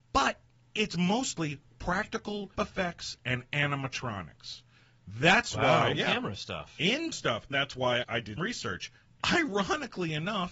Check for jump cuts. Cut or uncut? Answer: cut